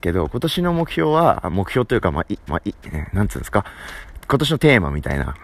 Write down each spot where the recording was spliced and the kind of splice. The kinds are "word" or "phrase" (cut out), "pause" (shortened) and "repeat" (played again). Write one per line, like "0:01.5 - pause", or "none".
0:02.5 - repeat